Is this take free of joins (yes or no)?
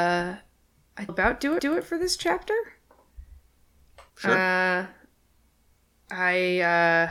no